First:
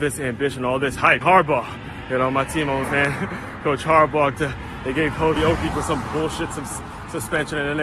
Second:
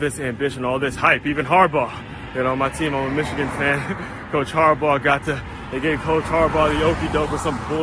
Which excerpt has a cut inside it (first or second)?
first